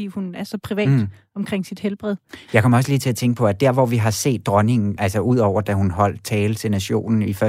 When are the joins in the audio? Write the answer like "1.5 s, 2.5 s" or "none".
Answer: none